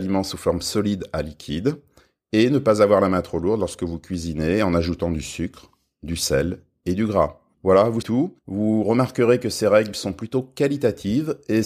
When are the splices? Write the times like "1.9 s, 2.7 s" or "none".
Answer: 8.0 s